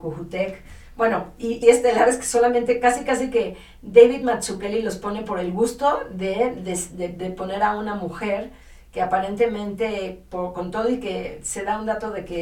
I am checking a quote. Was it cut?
yes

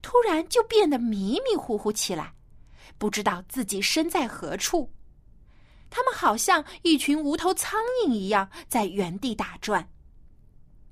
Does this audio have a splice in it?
no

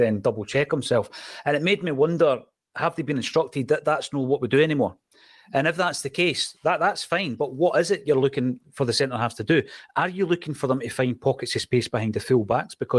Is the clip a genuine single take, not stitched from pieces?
yes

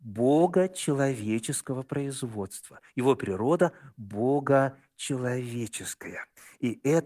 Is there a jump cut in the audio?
no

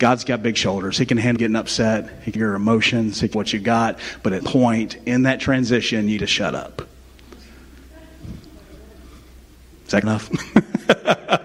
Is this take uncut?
no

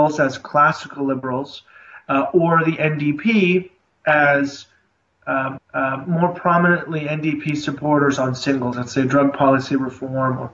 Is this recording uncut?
no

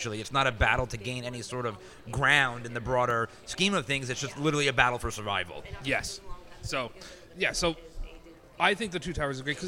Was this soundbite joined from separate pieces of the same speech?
no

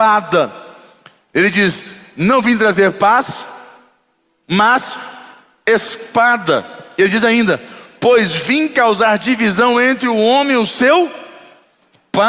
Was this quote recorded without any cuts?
yes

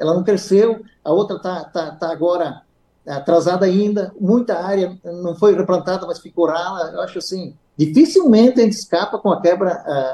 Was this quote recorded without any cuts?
yes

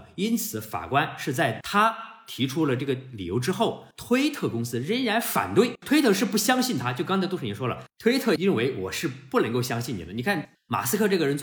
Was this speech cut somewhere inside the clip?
yes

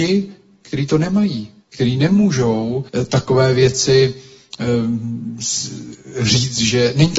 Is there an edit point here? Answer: yes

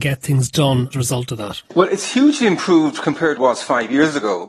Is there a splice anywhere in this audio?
yes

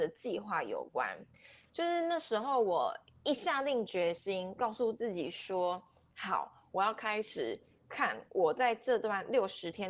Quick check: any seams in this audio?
no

